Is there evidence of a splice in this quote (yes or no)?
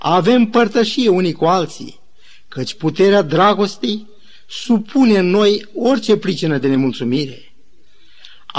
no